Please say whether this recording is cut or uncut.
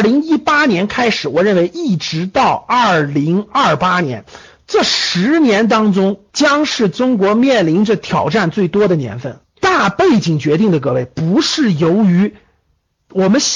cut